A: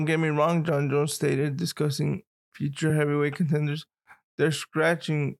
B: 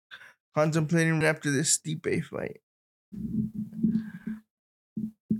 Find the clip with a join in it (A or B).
B